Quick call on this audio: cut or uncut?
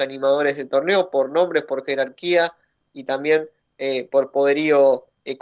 uncut